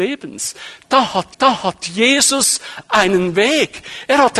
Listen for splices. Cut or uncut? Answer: cut